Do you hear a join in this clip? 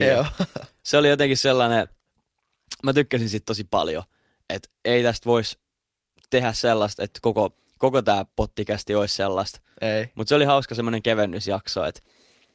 no; 0 cuts

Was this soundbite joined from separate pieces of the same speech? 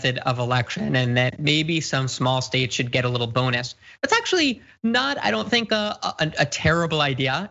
no; 0 cuts

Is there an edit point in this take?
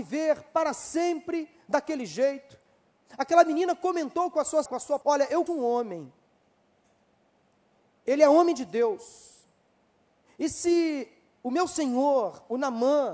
yes; 3 cuts; at 4.7 s, 5.0 s, 5.5 s

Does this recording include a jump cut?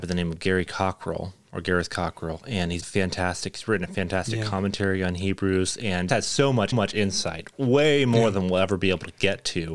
yes; 3 cuts; at 2.8 s, 6.1 s, 6.7 s

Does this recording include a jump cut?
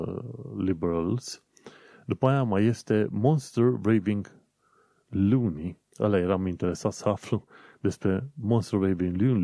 no; 0 cuts

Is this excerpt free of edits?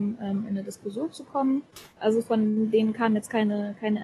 no; 1 cut; at 1.9 s

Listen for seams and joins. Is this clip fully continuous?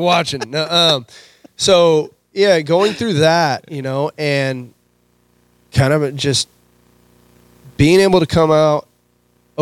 yes; 0 cuts

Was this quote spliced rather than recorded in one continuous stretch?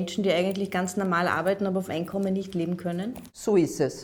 yes; 1 cut; at 1.9 s

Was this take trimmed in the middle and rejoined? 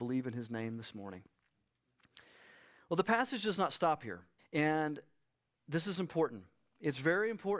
yes; 1 cut; at 4.4 s

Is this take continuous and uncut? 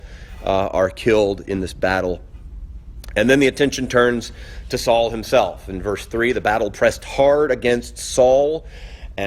yes; 0 cuts

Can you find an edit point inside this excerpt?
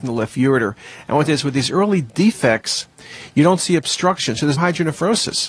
yes; 2 cuts; at 1.3 s, 4.6 s

